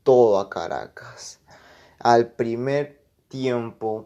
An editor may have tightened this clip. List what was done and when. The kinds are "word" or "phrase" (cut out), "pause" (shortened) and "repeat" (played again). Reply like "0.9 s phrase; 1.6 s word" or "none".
none